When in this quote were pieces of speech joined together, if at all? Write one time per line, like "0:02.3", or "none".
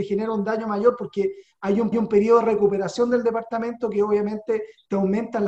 0:01.9